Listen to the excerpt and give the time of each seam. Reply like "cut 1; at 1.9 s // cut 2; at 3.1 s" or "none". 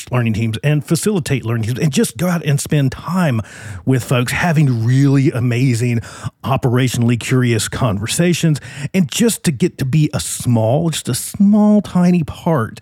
none